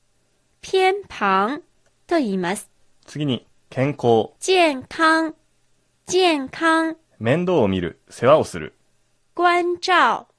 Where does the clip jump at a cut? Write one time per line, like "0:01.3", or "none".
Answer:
0:01.9
0:02.8
0:03.6
0:04.4
0:05.8
0:07.1